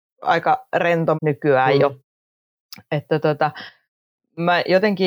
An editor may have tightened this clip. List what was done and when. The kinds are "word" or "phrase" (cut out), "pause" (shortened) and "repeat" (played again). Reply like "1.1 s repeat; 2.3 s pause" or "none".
1.1 s word